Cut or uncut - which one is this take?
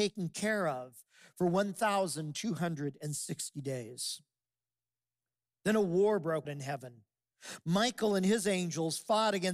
cut